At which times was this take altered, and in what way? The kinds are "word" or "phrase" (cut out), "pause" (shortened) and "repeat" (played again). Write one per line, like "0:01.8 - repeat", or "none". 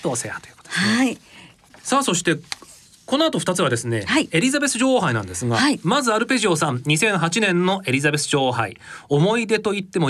none